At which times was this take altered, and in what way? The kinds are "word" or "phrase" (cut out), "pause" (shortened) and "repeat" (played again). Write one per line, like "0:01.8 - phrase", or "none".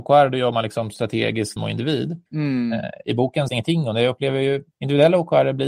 0:01.6 - word
0:02.3 - pause
0:03.5 - phrase
0:04.7 - pause